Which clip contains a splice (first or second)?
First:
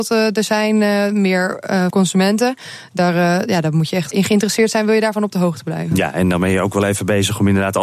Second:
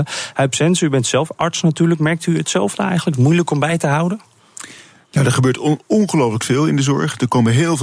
first